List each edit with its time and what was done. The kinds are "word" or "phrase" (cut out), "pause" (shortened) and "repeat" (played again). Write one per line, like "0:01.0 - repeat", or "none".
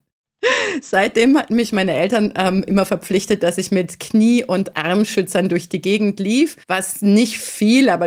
0:06.6 - pause